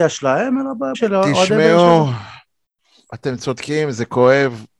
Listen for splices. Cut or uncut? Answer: cut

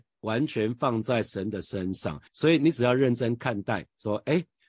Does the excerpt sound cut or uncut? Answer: cut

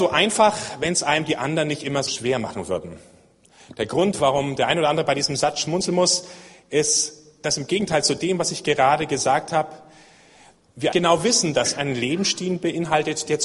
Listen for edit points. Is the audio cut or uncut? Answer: cut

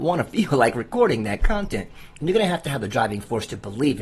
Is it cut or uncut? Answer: uncut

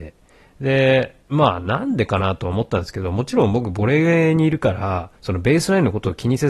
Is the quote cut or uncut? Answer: cut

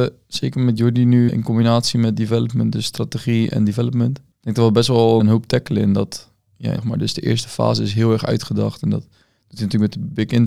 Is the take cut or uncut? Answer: cut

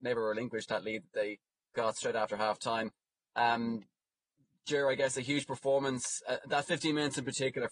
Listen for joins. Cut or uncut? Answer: uncut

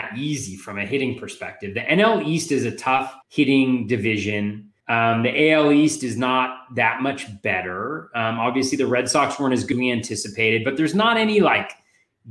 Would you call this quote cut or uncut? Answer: cut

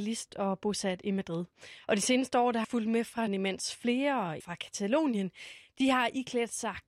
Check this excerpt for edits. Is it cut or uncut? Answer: cut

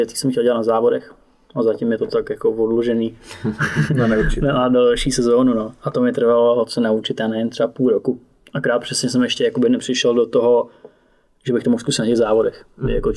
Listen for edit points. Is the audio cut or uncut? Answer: uncut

